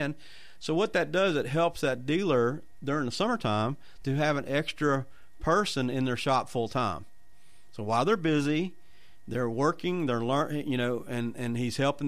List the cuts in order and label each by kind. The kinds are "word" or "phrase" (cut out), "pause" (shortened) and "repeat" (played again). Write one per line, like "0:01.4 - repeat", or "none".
none